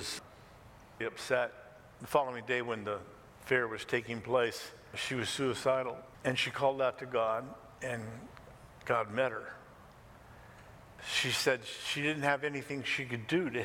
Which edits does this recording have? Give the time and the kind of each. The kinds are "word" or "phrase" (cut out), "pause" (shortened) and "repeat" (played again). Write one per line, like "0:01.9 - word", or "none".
0:01.0 - word